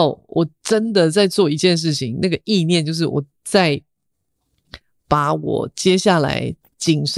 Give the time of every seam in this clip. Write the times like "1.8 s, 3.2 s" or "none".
none